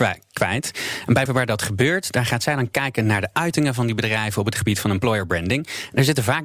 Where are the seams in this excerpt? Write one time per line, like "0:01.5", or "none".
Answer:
0:01.3